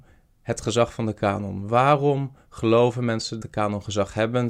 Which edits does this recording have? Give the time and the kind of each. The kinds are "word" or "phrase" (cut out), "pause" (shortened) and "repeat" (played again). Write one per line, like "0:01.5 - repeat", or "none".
0:03.4 - word